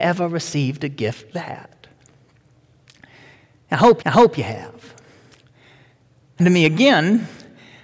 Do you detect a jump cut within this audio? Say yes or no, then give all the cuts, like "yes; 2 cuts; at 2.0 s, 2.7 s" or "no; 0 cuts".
yes; 3 cuts; at 1.3 s, 4.0 s, 6.4 s